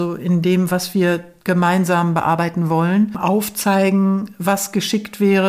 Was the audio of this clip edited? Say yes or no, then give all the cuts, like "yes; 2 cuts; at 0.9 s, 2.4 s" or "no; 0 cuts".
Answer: no; 0 cuts